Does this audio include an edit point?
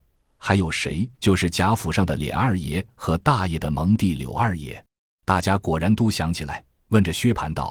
yes; 2 cuts; at 1.1 s, 4.9 s

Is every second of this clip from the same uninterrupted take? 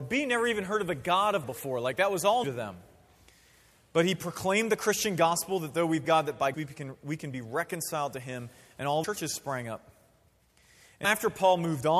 no; 6 cuts; at 1.4 s, 2.4 s, 6.0 s, 6.5 s, 9.0 s, 11.0 s

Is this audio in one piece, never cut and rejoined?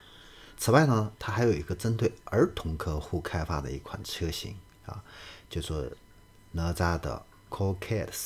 yes; 0 cuts

